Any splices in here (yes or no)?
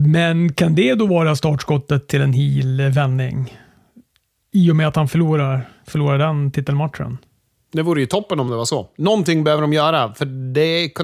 no